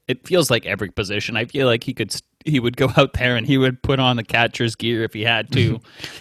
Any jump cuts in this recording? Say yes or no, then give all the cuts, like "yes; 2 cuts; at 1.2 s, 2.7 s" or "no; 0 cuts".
no; 0 cuts